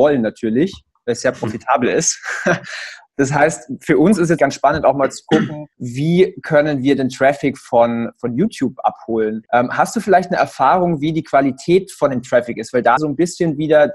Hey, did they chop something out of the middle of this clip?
yes; 4 cuts; at 4.4 s, 5.7 s, 9.5 s, 13.0 s

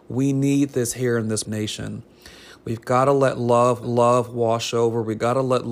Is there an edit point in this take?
yes; 2 cuts; at 1.4 s, 3.8 s

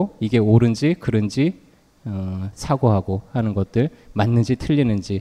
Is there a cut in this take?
no; 0 cuts

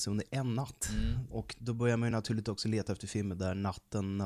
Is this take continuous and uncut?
yes; 0 cuts

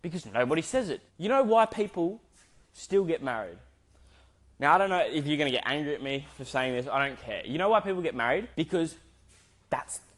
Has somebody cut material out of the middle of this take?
yes; 2 cuts; at 1.1 s, 8.5 s

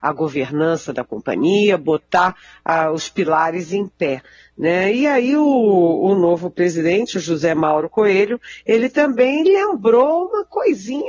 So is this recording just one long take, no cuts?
yes; 0 cuts

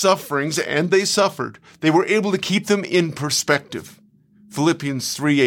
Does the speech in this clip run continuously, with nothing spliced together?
yes; 0 cuts

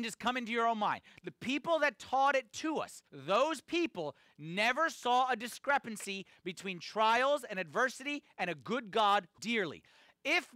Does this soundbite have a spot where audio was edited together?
yes; 2 cuts; at 3.1 s, 9.4 s

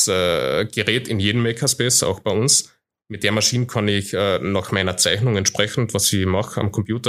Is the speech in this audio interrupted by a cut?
no; 0 cuts

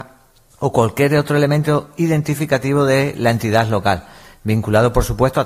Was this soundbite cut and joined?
no; 0 cuts

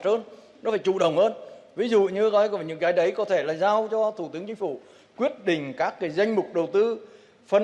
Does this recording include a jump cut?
no; 0 cuts

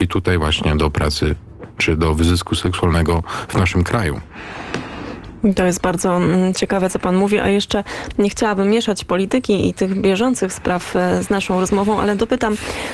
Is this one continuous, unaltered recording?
yes; 0 cuts

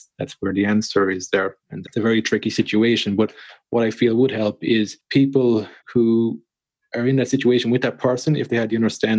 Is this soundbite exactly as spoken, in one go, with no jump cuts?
no; 2 cuts; at 1.8 s, 5.8 s

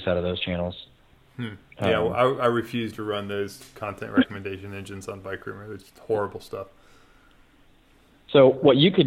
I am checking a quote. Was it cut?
no; 0 cuts

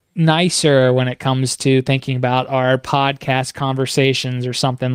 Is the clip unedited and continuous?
yes; 0 cuts

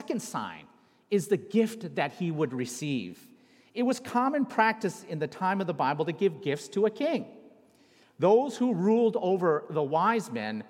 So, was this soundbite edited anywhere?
no; 0 cuts

